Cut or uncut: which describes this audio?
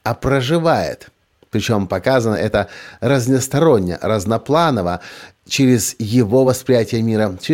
uncut